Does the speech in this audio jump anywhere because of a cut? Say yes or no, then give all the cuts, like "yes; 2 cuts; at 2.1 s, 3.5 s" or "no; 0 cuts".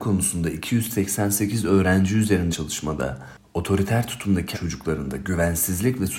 yes; 2 cuts; at 2.5 s, 4.5 s